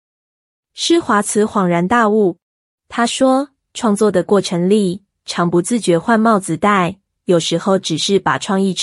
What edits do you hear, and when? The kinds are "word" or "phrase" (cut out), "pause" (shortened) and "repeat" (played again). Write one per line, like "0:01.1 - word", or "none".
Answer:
0:02.6 - pause